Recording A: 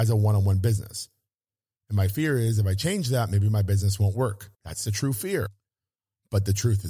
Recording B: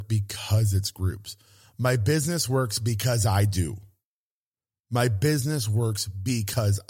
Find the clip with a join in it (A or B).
A